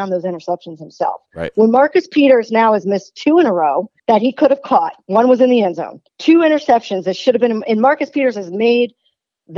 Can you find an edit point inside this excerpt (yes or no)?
yes